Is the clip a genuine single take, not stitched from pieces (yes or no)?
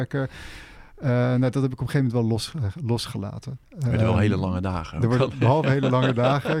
no